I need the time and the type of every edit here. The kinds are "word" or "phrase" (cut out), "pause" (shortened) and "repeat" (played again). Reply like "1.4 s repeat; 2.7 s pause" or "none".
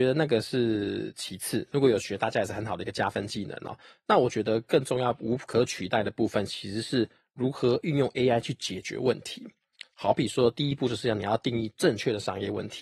none